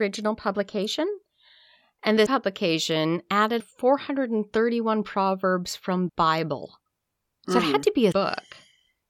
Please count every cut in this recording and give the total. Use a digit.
4